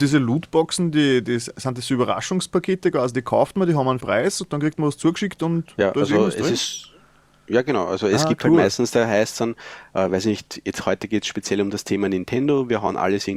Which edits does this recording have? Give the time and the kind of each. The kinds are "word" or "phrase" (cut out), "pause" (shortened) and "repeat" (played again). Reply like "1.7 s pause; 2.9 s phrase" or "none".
4.0 s word

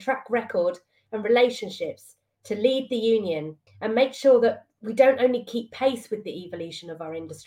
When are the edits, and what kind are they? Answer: 3.7 s pause

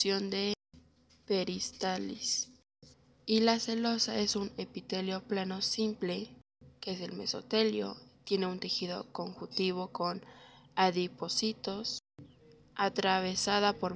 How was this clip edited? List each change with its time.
none

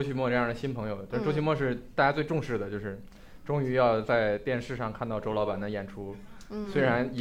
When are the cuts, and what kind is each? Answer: none

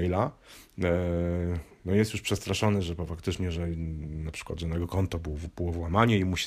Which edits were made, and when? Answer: none

